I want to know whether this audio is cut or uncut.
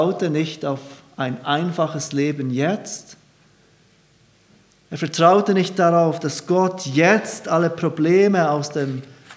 uncut